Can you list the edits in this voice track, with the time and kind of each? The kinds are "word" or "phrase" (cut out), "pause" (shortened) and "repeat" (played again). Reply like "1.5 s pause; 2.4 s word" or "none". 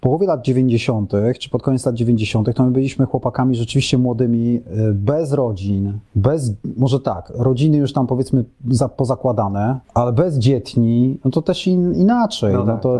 6.1 s pause; 9.8 s pause